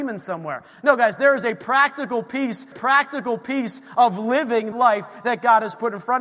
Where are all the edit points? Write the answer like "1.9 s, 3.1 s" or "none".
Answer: 2.7 s, 4.7 s